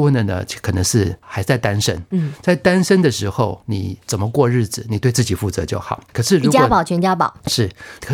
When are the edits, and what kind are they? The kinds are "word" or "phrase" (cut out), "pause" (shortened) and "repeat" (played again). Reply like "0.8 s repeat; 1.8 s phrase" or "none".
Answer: 6.1 s pause